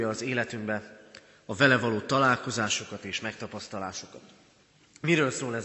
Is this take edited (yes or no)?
no